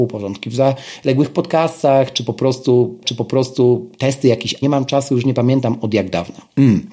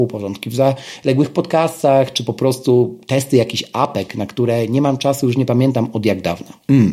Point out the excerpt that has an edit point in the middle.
first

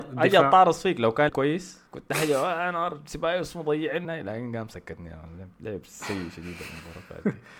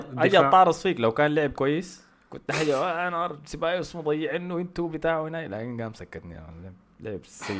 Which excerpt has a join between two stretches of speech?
first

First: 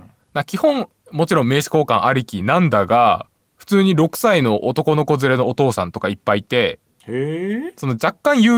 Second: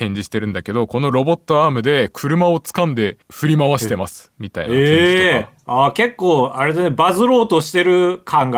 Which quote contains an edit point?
second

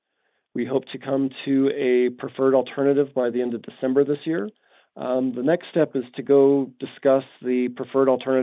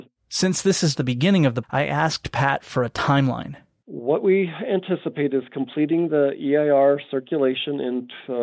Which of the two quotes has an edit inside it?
second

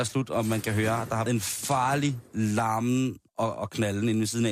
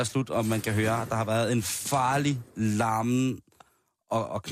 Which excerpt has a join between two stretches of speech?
first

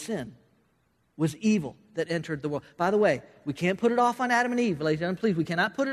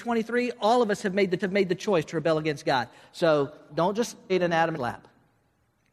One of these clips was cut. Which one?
second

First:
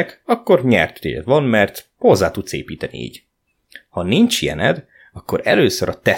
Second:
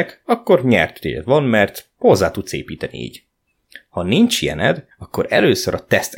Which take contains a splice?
second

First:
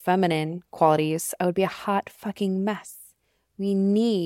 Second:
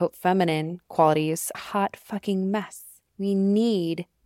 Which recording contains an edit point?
second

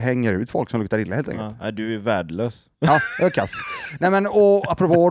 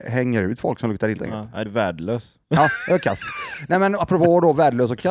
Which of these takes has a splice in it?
second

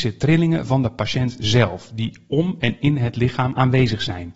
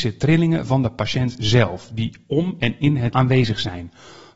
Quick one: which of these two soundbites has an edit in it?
second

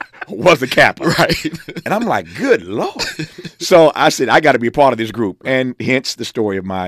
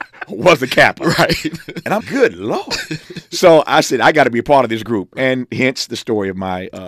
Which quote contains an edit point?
second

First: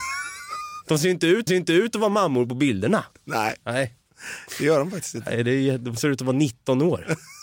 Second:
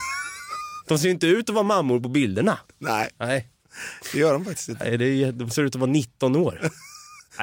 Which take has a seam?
first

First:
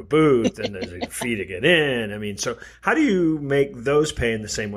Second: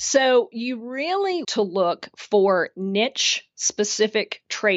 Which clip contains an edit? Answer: second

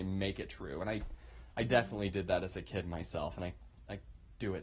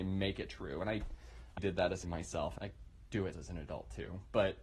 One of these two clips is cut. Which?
second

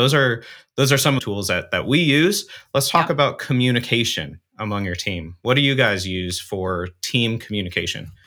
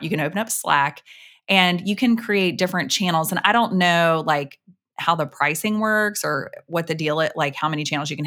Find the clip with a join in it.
first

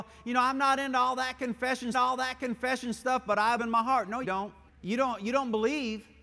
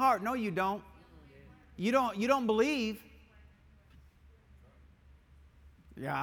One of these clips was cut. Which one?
first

